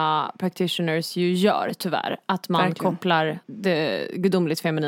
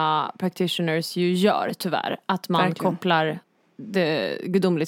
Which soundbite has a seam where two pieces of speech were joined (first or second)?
first